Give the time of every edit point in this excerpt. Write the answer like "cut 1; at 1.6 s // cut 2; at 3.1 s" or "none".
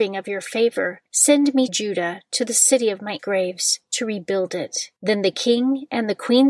cut 1; at 1.1 s // cut 2; at 1.7 s // cut 3; at 3.2 s // cut 4; at 5.0 s